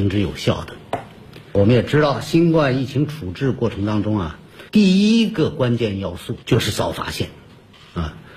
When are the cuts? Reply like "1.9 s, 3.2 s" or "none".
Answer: 4.7 s, 6.4 s

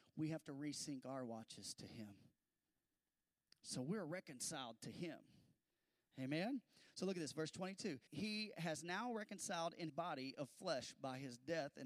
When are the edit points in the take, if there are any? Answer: 8.1 s, 9.9 s

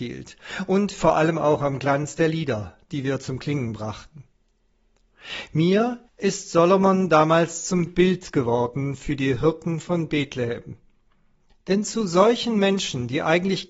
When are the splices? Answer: 6.1 s

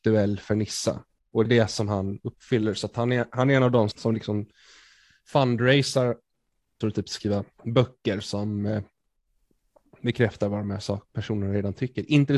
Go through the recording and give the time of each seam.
1.4 s, 3.9 s, 6.8 s, 7.5 s

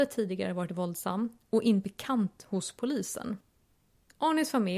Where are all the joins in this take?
1.8 s

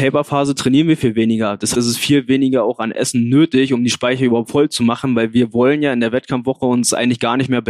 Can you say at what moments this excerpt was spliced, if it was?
1.7 s

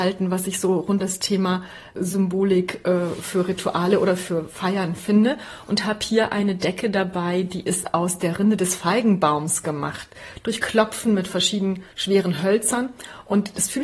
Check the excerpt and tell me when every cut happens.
1.0 s, 11.9 s

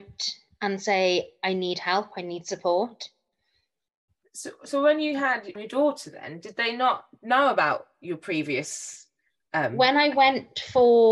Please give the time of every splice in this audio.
5.6 s

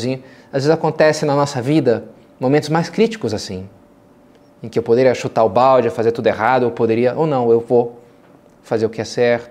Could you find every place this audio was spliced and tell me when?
none

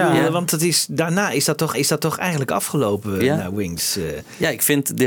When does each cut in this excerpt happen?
1.7 s

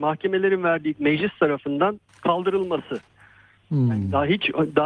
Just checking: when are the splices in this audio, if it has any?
0.9 s, 2.1 s

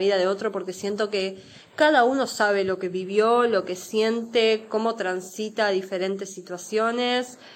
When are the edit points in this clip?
none

